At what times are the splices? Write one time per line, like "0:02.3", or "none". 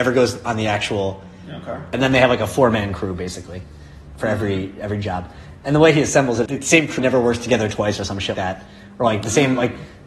0:06.5
0:07.0
0:08.3